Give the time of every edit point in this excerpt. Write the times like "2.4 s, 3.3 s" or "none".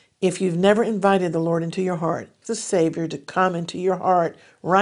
2.4 s